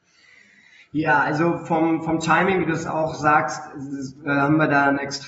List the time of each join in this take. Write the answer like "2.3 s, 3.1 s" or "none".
none